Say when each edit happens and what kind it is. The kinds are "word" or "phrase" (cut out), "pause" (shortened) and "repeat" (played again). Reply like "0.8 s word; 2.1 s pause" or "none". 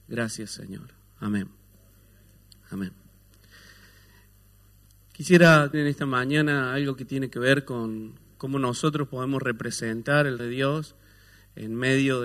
5.7 s word; 10.4 s word